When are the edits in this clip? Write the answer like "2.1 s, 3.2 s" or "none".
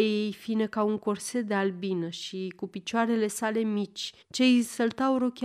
4.2 s

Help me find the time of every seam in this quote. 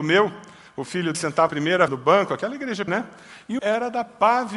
1.1 s, 1.5 s, 1.9 s, 2.9 s, 3.6 s

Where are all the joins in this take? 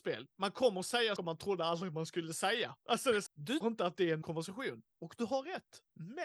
1.2 s, 3.3 s, 3.6 s, 4.2 s

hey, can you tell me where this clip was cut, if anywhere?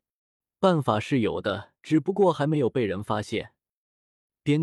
1.8 s

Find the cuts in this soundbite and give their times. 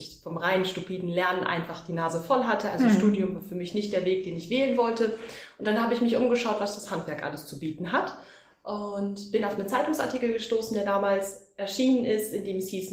none

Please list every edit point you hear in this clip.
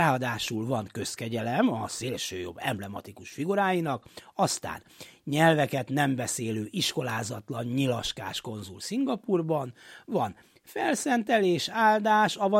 none

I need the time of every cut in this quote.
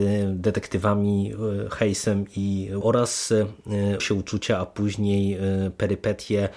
2.8 s, 4.0 s

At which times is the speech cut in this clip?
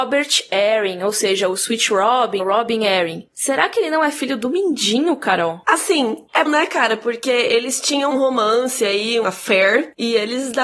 2.4 s, 6.5 s, 8.1 s, 9.2 s

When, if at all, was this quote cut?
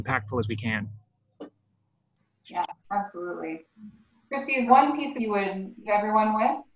4.7 s, 5.2 s, 5.9 s

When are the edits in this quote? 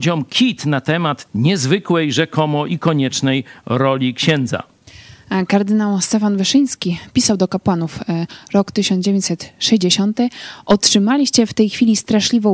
1.3 s

